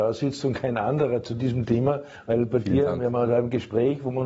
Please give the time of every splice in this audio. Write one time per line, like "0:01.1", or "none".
none

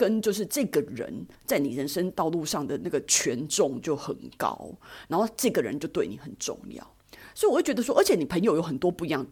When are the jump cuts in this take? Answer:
0:01.3

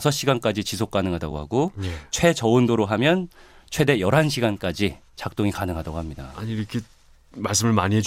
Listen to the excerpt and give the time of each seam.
none

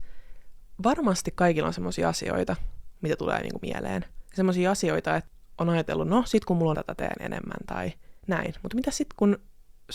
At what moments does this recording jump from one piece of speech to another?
0:06.7

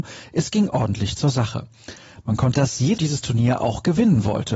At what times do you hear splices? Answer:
0:02.5
0:03.0

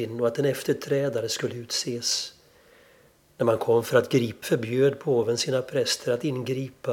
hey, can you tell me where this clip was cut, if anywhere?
0:04.4

